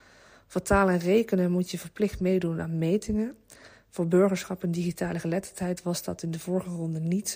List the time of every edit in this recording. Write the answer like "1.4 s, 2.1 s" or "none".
none

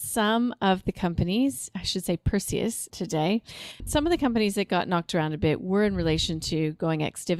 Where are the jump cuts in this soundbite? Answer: 2.9 s, 3.8 s

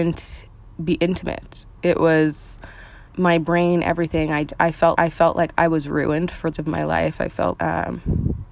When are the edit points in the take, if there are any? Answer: 1.8 s, 3.1 s, 5.0 s, 6.5 s, 7.6 s

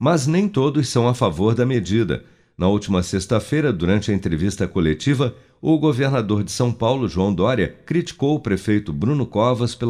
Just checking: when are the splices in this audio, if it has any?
none

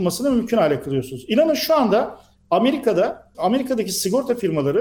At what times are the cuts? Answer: 3.3 s

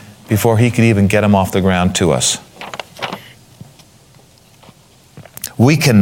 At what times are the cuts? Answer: 2.5 s

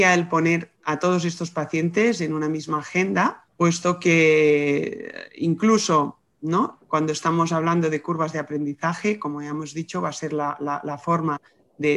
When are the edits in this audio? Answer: 3.5 s

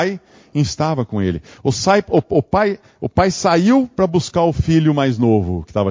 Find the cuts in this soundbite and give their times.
none

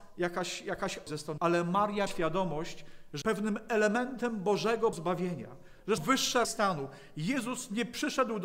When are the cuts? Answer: 1.1 s, 1.4 s, 2.1 s, 3.2 s, 4.9 s, 6.0 s, 6.4 s

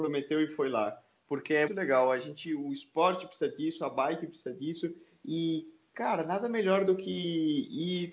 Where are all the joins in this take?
1.7 s

